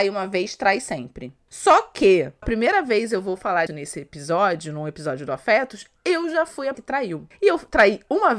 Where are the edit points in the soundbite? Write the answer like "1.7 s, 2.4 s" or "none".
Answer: 2.4 s, 3.7 s, 6.7 s